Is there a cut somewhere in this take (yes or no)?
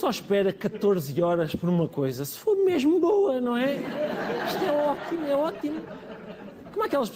no